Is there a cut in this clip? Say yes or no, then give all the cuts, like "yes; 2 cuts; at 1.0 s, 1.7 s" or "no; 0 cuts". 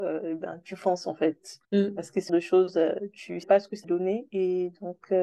yes; 4 cuts; at 1.6 s, 2.3 s, 3.4 s, 3.8 s